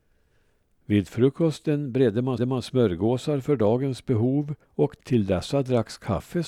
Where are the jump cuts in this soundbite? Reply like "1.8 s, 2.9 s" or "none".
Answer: 2.4 s, 4.6 s